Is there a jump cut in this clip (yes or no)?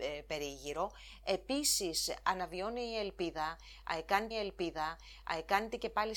yes